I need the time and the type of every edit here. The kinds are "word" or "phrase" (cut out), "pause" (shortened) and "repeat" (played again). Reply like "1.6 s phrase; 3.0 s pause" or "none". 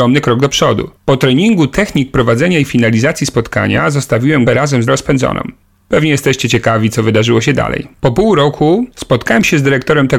1.0 s pause; 4.5 s word; 4.9 s phrase; 5.6 s pause